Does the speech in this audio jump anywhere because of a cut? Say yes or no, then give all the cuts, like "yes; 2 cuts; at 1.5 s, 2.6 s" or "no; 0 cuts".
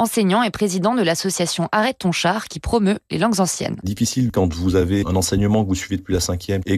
no; 0 cuts